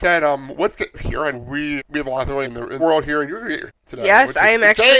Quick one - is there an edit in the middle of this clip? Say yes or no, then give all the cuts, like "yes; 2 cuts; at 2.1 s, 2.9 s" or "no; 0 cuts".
yes; 6 cuts; at 0.9 s, 1.3 s, 1.8 s, 2.4 s, 2.8 s, 3.7 s